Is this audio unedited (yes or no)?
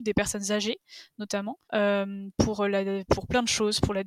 no